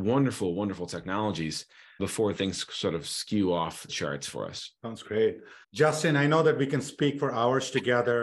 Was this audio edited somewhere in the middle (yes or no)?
yes